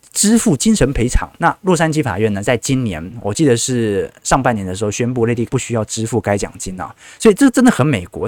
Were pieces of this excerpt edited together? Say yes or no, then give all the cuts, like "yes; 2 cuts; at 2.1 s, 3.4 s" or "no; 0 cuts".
yes; 2 cuts; at 1.4 s, 5.5 s